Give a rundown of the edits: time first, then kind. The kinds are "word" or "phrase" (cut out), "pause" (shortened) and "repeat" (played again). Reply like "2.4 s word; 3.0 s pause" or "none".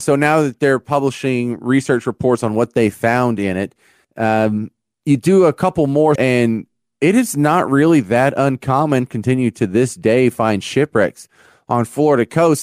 6.2 s word; 9.1 s phrase